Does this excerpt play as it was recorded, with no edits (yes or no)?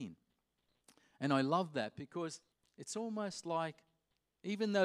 no